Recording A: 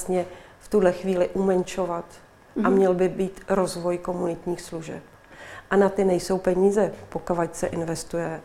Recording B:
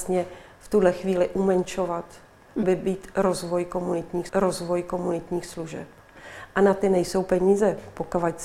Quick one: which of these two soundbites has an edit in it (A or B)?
B